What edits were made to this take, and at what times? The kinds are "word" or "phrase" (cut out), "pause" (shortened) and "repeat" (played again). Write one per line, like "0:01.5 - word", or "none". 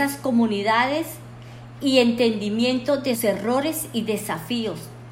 0:03.2 - word